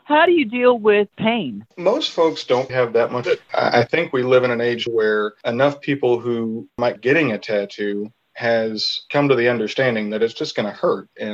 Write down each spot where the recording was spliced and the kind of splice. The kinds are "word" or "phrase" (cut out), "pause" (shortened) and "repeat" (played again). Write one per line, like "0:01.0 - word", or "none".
0:02.7 - word
0:03.2 - phrase
0:04.9 - word
0:07.0 - word